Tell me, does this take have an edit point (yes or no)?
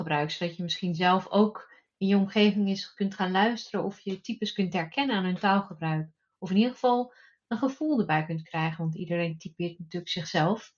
no